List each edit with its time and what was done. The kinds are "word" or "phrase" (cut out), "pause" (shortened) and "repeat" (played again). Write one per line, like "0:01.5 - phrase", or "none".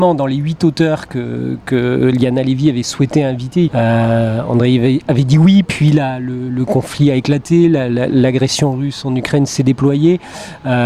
0:03.7 - phrase